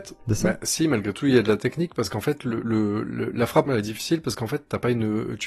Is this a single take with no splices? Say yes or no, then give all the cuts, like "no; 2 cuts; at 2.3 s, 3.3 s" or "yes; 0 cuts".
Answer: no; 1 cut; at 3.7 s